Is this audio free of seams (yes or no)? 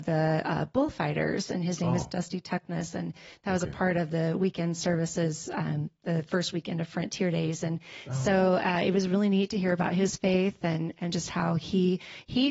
yes